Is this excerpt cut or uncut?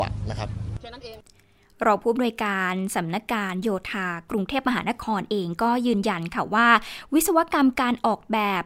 uncut